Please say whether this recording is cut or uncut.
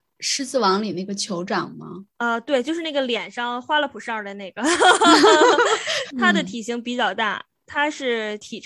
cut